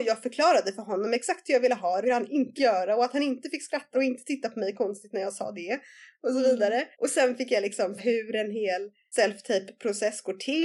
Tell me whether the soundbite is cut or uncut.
cut